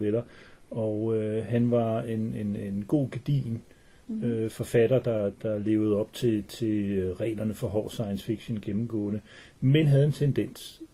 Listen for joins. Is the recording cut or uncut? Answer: uncut